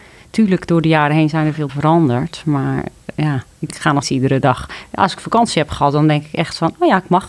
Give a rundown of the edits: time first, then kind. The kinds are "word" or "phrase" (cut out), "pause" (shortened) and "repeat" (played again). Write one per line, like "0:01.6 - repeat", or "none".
0:01.7 - word
0:04.0 - word